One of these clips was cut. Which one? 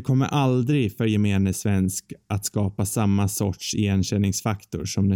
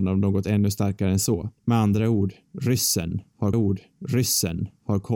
second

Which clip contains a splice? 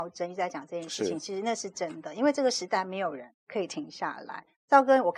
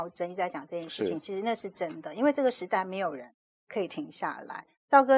first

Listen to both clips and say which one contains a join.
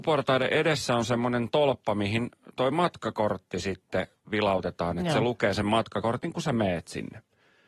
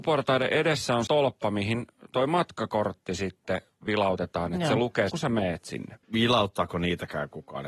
second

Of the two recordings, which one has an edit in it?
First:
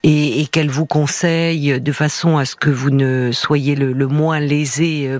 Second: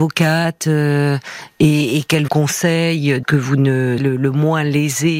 second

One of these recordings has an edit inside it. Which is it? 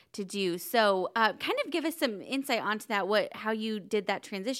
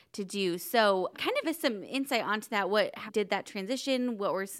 second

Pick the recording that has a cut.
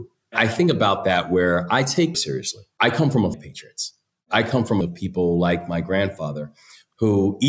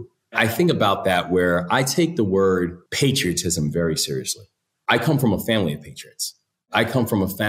first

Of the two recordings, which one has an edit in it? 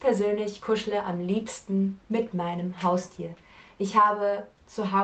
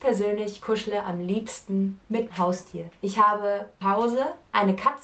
second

